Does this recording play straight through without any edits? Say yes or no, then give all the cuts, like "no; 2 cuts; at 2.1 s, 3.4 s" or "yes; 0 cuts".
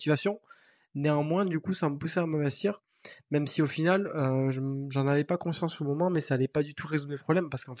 yes; 0 cuts